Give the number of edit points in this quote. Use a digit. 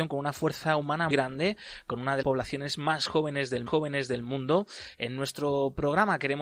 3